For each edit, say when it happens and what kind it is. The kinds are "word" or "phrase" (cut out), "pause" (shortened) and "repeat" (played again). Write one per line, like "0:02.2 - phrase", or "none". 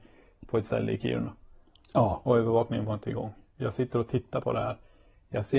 none